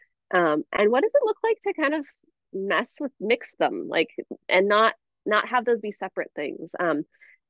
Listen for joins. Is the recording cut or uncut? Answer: uncut